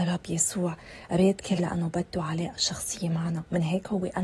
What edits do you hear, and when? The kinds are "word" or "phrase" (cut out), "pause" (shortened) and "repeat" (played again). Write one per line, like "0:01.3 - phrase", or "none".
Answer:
0:01.6 - word